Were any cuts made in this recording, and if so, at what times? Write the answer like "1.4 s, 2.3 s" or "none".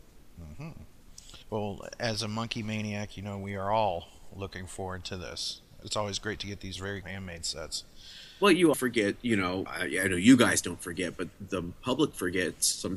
1.4 s, 5.8 s, 7.0 s, 8.7 s, 9.7 s